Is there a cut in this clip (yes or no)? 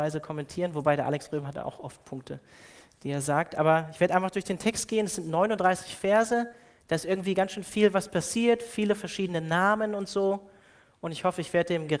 no